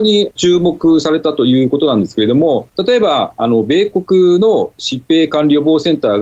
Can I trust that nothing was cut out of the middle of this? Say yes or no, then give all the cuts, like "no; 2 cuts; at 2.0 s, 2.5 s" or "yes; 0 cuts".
no; 1 cut; at 5.0 s